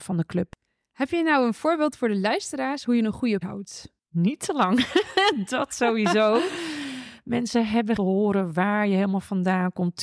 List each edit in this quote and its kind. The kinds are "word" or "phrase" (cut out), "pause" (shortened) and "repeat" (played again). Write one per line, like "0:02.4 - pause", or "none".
0:03.4 - word
0:08.0 - phrase